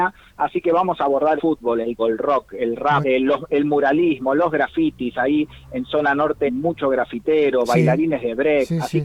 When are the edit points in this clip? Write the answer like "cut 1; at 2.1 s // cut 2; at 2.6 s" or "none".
cut 1; at 1.4 s // cut 2; at 2.0 s // cut 3; at 3.0 s // cut 4; at 6.5 s

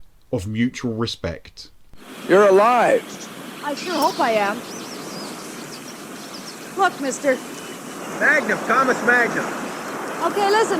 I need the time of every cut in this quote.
none

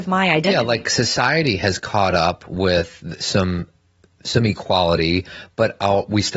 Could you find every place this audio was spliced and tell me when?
none

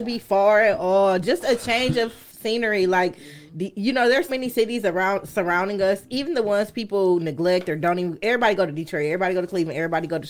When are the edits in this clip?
cut 1; at 4.3 s

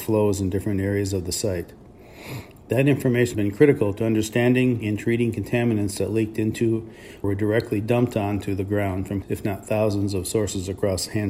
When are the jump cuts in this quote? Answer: cut 1; at 3.3 s // cut 2; at 4.8 s // cut 3; at 7.2 s // cut 4; at 9.2 s

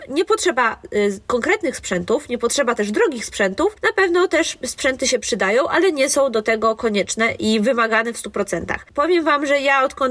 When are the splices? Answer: cut 1; at 1.2 s

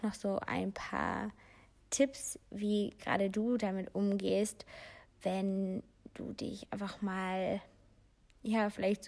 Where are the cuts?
none

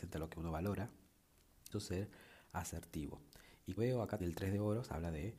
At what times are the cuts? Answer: cut 1; at 1.7 s // cut 2; at 3.8 s // cut 3; at 4.2 s

